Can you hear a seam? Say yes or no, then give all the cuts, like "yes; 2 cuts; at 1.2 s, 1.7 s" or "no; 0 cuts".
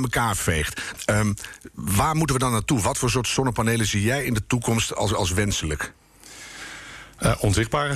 no; 0 cuts